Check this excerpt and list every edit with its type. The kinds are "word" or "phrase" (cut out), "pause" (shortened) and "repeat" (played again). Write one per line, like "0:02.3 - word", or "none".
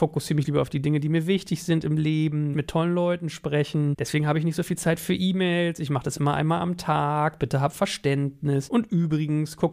0:02.5 - word